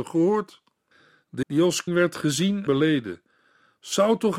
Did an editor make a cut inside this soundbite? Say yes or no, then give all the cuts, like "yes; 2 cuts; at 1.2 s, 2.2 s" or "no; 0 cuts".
yes; 3 cuts; at 1.4 s, 1.9 s, 2.7 s